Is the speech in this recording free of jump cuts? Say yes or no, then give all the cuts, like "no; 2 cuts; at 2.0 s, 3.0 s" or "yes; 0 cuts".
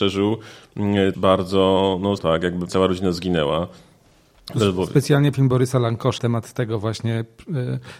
no; 5 cuts; at 1.1 s, 2.2 s, 2.7 s, 5.3 s, 6.2 s